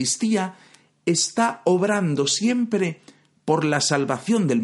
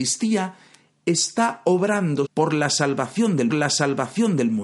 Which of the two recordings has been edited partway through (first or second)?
second